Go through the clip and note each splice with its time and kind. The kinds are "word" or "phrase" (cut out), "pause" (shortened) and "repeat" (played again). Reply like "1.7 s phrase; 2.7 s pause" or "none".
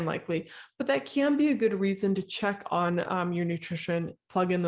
none